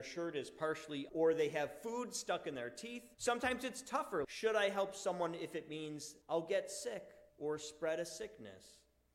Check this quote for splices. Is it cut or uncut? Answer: cut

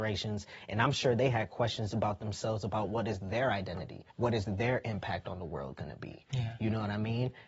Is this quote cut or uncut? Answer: cut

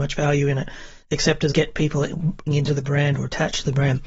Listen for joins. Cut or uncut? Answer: cut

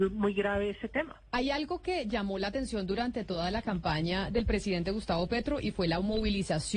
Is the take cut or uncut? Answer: uncut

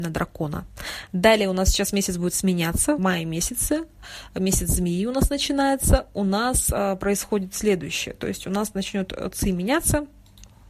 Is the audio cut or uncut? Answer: cut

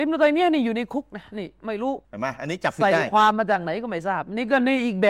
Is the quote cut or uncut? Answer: cut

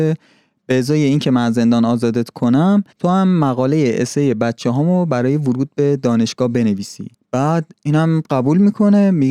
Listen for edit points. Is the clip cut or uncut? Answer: cut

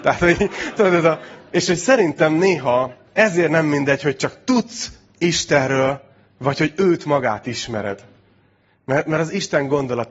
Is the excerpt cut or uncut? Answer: cut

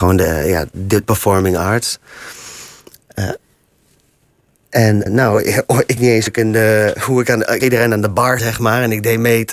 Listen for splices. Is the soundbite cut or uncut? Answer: cut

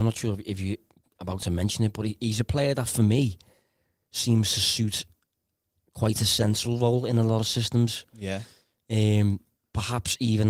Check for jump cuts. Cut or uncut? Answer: uncut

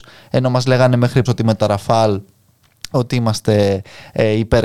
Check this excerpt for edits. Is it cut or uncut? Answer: cut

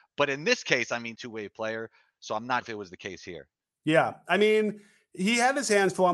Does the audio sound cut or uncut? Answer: cut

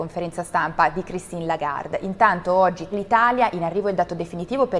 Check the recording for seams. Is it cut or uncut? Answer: cut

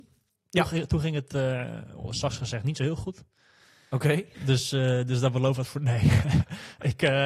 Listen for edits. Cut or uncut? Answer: uncut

